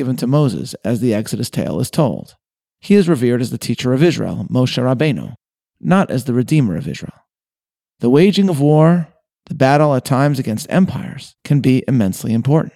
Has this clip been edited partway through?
no; 0 cuts

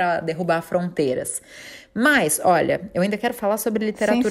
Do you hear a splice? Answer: no; 0 cuts

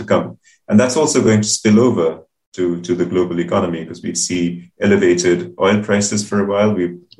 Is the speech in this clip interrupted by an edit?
no; 0 cuts

